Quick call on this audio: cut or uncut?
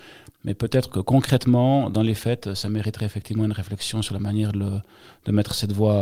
uncut